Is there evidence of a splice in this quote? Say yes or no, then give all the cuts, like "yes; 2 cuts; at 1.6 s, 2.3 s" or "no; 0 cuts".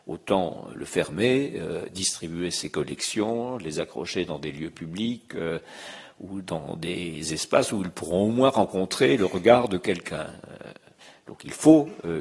no; 0 cuts